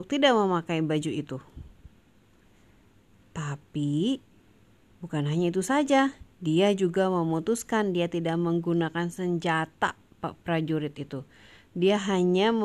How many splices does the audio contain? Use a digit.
0